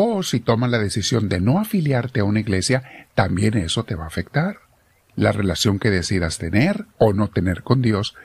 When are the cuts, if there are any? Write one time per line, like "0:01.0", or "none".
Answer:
0:04.9
0:06.9